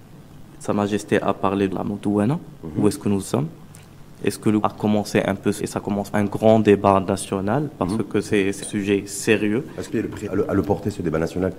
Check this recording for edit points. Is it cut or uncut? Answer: cut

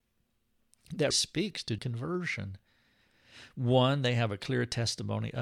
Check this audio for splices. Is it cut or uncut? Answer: cut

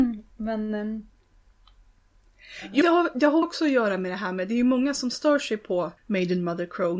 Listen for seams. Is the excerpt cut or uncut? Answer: cut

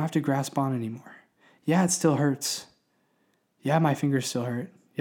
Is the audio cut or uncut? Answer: uncut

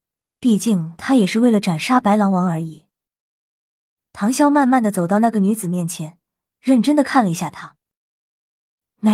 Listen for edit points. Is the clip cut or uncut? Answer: uncut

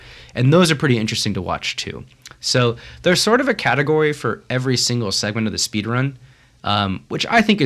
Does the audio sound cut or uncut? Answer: uncut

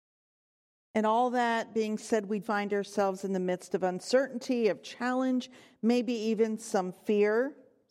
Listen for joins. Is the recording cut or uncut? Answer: cut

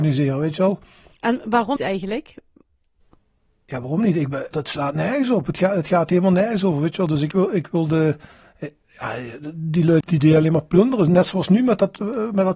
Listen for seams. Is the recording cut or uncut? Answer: cut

